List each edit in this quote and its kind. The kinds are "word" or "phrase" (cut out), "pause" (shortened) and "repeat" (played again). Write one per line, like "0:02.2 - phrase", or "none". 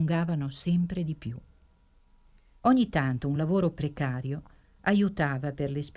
none